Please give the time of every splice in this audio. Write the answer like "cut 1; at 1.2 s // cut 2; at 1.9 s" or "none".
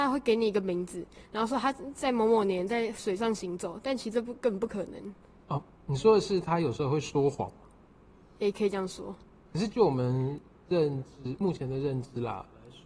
cut 1; at 5.2 s